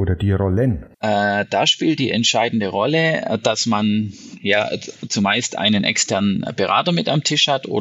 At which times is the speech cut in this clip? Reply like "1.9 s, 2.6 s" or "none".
0.9 s